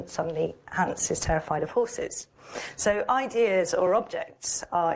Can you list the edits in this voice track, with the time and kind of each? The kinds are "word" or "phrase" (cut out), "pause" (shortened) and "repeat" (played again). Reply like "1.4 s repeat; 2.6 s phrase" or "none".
none